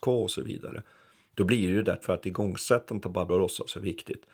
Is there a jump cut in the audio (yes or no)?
yes